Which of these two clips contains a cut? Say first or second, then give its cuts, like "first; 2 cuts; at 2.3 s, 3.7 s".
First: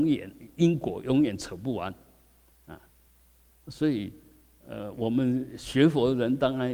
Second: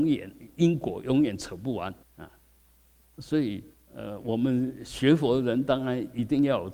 second; 2 cuts; at 2.0 s, 3.7 s